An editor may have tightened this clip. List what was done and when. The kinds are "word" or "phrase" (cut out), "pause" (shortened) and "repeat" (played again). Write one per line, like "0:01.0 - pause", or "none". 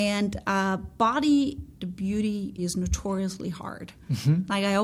0:01.7 - word
0:02.6 - word